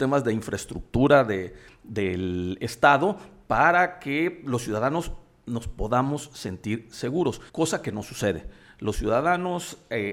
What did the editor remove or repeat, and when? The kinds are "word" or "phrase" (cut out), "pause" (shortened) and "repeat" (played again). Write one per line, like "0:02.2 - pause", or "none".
0:07.5 - pause